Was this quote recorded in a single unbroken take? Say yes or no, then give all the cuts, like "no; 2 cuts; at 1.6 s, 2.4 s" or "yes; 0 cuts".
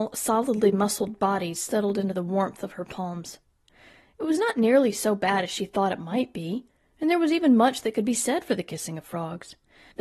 yes; 0 cuts